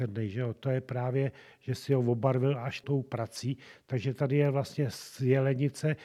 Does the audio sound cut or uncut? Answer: uncut